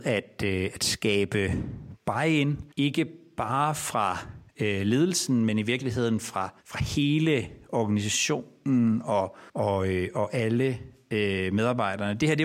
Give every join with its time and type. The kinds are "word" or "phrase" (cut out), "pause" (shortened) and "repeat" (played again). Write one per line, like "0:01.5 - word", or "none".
0:02.7 - pause
0:04.5 - pause
0:06.6 - pause
0:09.5 - pause